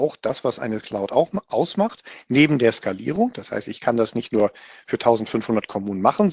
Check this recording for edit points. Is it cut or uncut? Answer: uncut